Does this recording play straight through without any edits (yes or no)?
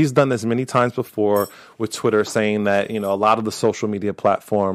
yes